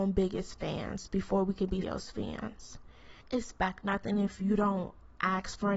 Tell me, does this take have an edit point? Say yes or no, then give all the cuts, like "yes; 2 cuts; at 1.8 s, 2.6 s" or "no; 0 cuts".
yes; 1 cut; at 1.8 s